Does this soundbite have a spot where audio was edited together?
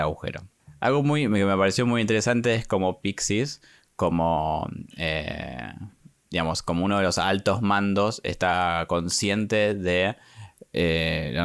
no; 0 cuts

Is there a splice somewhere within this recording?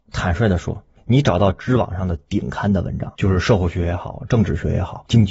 yes; 1 cut; at 3.1 s

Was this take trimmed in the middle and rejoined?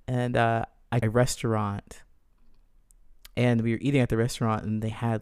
yes; 1 cut; at 1.0 s

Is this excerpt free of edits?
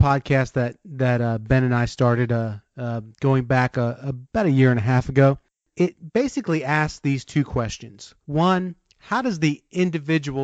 no; 4 cuts; at 3.1 s, 4.3 s, 5.5 s, 8.2 s

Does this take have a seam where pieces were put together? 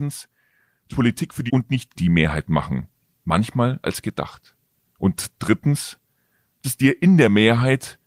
yes; 5 cuts; at 0.9 s, 1.5 s, 2.0 s, 3.8 s, 6.6 s

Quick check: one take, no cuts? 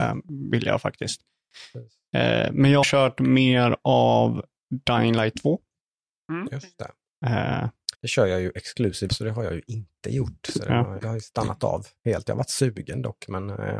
no; 4 cuts; at 2.8 s, 7.9 s, 9.1 s, 11.0 s

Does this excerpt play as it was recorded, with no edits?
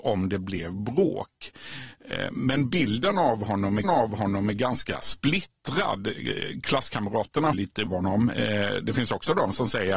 no; 3 cuts; at 3.8 s, 7.5 s, 7.9 s

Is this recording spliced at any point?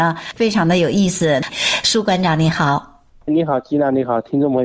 yes; 1 cut; at 3.3 s

